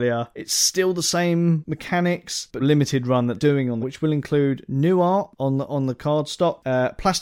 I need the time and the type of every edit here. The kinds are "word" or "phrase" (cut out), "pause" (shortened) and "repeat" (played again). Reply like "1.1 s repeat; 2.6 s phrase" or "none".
2.6 s phrase; 3.4 s word; 3.8 s phrase